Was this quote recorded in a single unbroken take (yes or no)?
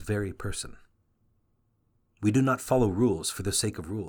yes